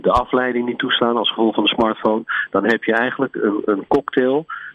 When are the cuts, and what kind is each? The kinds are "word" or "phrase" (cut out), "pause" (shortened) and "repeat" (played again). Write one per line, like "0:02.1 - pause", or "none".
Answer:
none